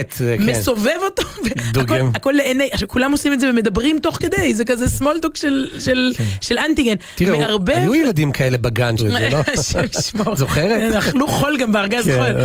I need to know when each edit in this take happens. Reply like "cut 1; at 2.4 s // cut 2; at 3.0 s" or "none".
cut 1; at 9.0 s